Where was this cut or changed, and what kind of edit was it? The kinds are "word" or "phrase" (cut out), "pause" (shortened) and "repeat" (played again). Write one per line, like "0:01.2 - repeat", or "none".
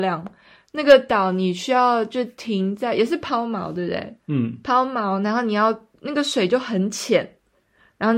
0:04.2 - pause